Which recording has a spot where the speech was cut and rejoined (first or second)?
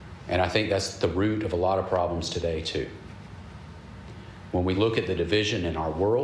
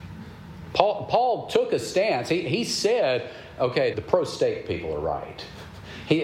second